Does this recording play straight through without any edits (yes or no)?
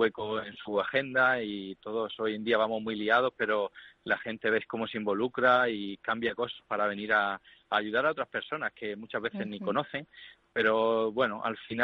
yes